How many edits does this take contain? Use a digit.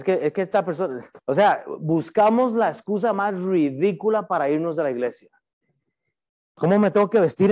2